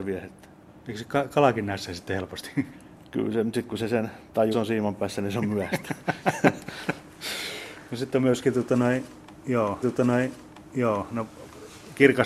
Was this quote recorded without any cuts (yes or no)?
no